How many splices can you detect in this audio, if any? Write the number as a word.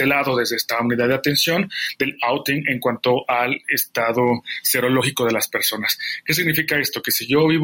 zero